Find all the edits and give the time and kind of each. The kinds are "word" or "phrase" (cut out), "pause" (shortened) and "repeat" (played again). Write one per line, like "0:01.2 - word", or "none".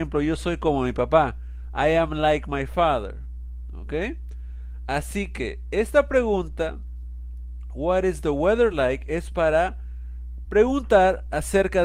none